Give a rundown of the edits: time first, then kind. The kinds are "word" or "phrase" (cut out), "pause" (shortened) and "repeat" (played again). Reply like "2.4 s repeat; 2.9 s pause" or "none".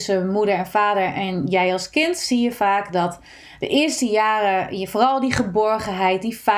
none